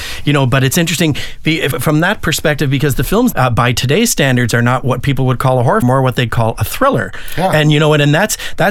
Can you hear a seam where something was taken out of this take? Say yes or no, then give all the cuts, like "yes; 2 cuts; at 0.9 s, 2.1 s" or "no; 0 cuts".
yes; 3 cuts; at 1.7 s, 3.3 s, 5.8 s